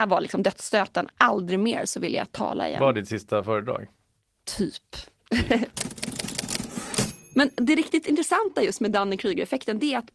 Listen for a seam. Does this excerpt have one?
no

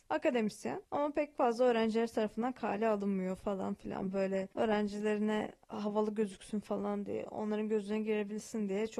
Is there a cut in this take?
yes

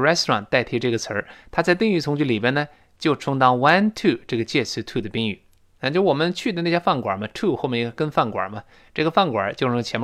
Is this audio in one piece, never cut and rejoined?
yes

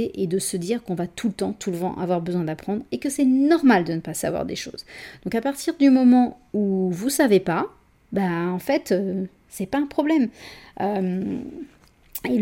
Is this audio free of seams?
yes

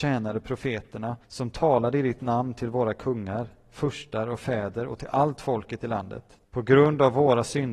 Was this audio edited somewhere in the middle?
yes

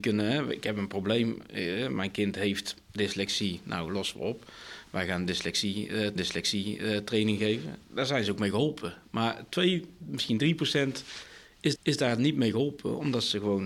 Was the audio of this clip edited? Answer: yes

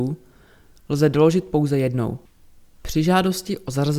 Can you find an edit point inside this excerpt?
no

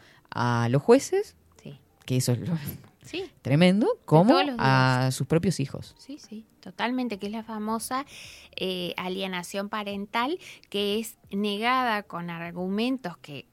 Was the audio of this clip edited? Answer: yes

